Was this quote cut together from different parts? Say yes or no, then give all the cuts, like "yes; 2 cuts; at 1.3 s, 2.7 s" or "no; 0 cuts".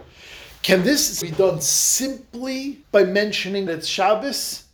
yes; 3 cuts; at 1.2 s, 2.8 s, 3.7 s